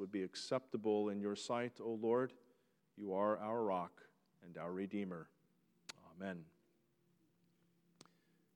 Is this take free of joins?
yes; 0 cuts

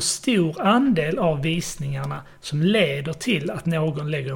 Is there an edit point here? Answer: no; 0 cuts

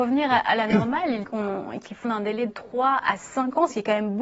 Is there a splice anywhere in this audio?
yes; 3 cuts; at 1.2 s, 2.0 s, 2.5 s

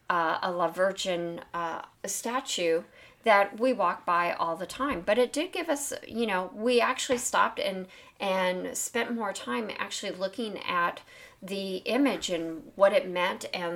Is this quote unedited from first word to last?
no; 1 cut; at 1.9 s

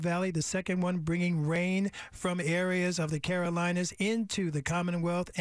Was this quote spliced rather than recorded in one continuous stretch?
no; 0 cuts

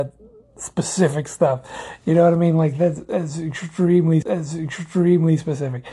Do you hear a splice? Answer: yes; 1 cut; at 4.2 s

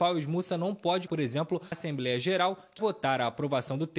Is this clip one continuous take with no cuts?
no; 3 cuts; at 1.1 s, 1.7 s, 2.8 s

